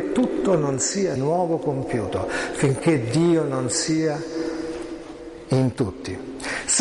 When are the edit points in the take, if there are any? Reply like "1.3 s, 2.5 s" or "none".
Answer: 1.2 s